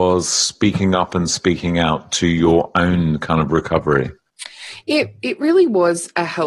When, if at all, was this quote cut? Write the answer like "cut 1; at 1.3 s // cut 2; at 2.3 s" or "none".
none